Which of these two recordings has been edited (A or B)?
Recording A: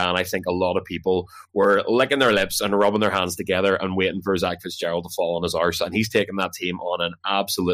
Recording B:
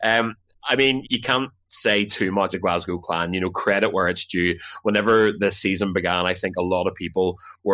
B